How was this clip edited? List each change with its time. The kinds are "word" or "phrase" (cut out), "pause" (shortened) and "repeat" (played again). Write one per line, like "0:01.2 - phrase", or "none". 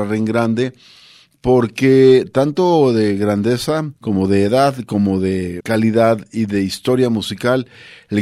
0:04.0 - pause
0:05.6 - word